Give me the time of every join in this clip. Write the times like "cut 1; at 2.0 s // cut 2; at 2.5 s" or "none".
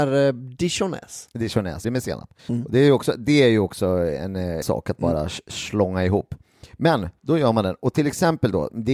cut 1; at 1.8 s // cut 2; at 2.4 s // cut 3; at 4.6 s // cut 4; at 6.7 s